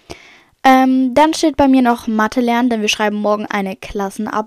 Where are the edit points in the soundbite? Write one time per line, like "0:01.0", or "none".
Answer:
none